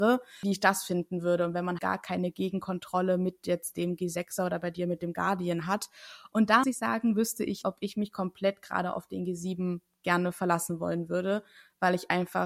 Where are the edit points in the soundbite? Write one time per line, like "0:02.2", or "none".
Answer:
0:01.8
0:06.6
0:07.6